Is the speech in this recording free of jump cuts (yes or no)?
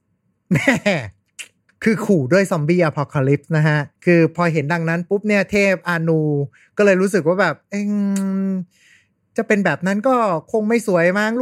no